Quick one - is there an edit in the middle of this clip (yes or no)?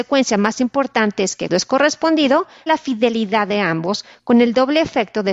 yes